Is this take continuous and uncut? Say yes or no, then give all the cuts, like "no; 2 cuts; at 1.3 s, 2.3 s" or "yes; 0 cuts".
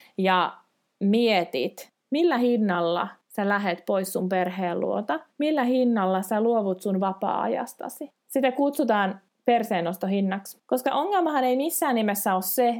no; 2 cuts; at 5.3 s, 10.6 s